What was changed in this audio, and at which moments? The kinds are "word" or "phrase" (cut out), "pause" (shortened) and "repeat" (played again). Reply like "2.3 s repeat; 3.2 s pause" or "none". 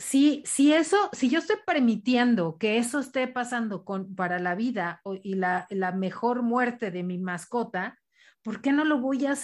none